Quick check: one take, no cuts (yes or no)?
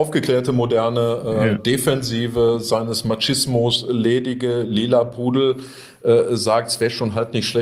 yes